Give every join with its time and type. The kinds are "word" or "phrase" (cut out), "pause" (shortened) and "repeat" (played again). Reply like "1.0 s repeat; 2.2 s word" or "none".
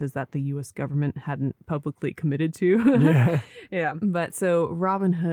none